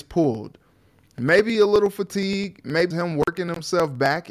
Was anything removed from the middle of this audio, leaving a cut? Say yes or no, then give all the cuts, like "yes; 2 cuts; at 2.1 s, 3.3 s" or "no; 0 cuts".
yes; 1 cut; at 2.9 s